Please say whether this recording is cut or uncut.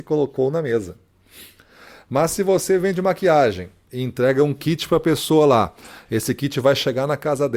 uncut